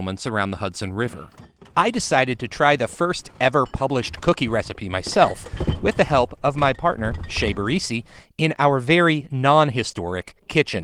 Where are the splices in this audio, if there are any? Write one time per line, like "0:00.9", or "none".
none